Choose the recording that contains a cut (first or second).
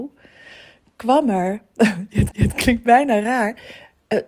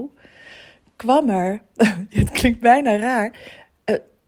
first